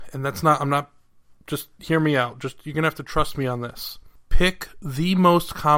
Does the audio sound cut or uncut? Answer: uncut